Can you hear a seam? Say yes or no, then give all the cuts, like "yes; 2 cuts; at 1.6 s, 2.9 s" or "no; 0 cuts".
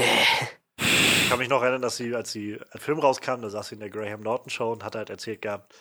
yes; 1 cut; at 2.8 s